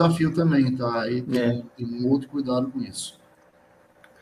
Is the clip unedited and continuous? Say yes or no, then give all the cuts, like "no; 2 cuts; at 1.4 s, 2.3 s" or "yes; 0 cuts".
yes; 0 cuts